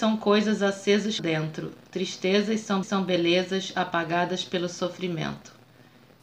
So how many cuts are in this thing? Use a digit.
2